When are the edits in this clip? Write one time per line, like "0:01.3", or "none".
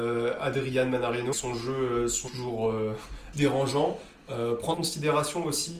0:01.3
0:02.3
0:03.3
0:04.7